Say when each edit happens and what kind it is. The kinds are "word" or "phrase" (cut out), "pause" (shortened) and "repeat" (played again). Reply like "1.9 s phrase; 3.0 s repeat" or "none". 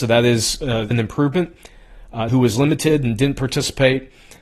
0.9 s phrase; 2.3 s phrase